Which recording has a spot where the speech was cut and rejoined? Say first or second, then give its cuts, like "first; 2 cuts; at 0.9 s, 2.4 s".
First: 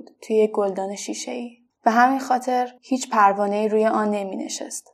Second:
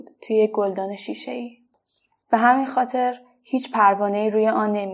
first; 2 cuts; at 1.7 s, 2.8 s